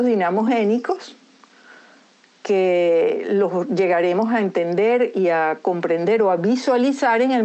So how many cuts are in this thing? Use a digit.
0